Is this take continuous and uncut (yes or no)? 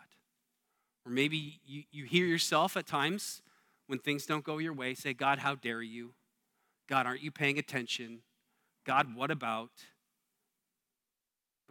yes